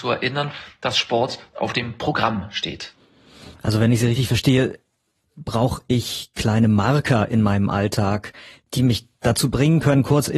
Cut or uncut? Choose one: uncut